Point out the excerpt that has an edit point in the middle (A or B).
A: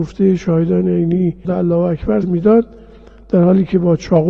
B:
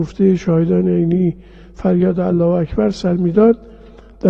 A